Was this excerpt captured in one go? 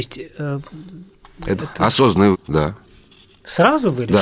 no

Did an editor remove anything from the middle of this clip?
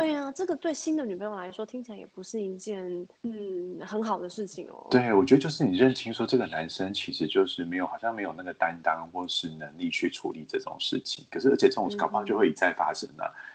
yes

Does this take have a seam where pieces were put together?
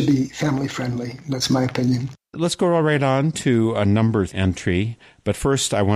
yes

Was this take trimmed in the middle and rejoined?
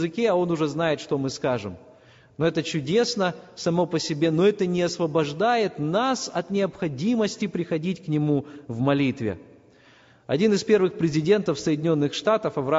no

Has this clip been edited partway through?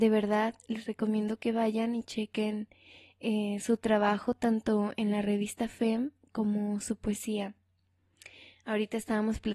no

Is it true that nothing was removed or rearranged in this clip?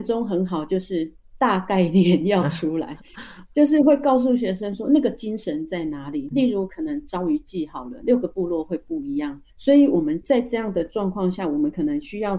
no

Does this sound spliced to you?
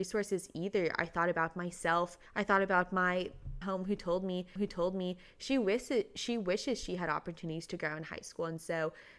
yes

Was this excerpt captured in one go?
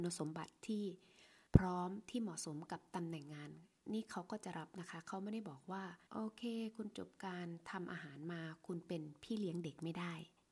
no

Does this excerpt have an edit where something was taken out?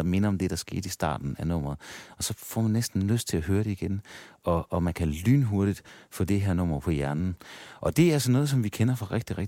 no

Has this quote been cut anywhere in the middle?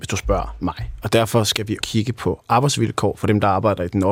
yes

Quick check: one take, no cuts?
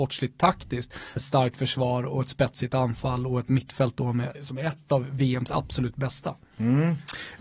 no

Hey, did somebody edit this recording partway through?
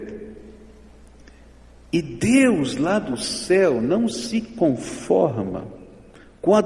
no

